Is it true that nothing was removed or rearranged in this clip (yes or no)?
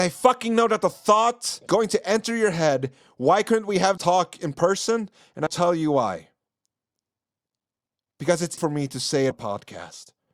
no